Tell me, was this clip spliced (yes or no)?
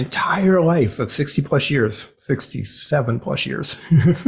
no